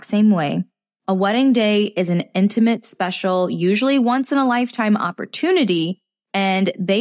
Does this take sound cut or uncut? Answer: uncut